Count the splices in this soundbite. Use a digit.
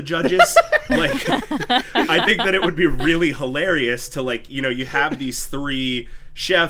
0